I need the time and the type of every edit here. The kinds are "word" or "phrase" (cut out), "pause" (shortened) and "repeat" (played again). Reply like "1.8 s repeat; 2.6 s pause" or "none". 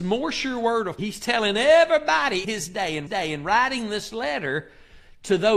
1.0 s word; 2.4 s word; 3.1 s repeat